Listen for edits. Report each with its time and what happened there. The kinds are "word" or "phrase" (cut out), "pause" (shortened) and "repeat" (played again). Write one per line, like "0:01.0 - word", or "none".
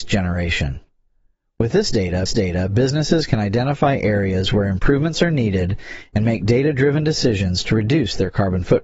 0:02.3 - repeat